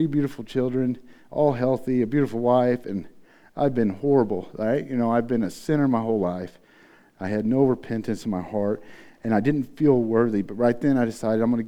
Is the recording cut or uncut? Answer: uncut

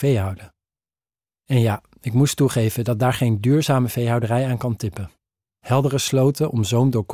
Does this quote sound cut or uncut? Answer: uncut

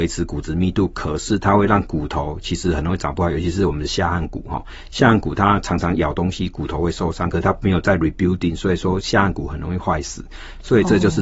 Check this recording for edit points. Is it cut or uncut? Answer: uncut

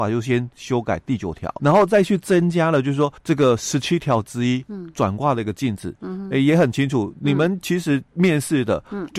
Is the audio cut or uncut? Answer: cut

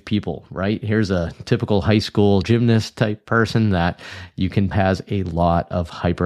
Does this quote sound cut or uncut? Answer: cut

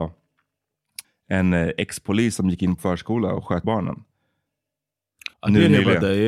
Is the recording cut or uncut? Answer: cut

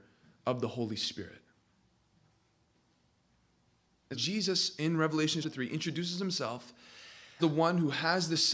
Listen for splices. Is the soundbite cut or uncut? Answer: cut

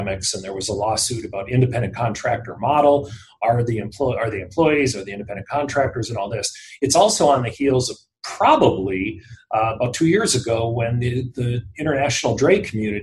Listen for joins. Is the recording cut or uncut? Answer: uncut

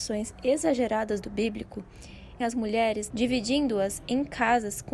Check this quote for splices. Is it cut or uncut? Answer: cut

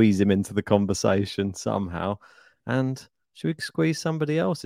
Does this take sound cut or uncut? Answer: uncut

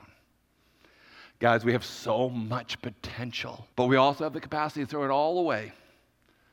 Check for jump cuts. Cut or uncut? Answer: cut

